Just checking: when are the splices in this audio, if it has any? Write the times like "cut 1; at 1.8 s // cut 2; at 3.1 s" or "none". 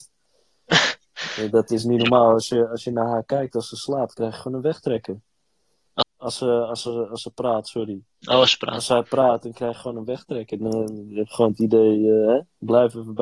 cut 1; at 6.0 s